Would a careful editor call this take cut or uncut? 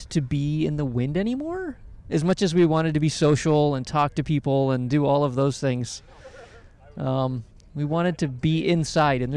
uncut